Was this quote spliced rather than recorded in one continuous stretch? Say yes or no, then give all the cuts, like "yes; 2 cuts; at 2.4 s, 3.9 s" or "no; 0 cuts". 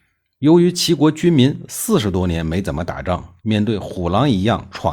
yes; 1 cut; at 3.4 s